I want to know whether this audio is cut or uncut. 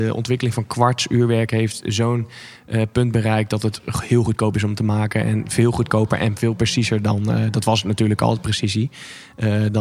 uncut